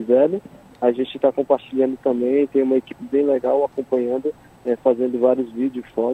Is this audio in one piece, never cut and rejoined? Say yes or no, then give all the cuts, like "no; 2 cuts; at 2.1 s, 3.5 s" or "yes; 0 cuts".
yes; 0 cuts